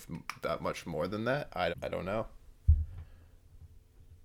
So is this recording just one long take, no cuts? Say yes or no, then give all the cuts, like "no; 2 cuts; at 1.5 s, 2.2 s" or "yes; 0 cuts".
no; 1 cut; at 1.7 s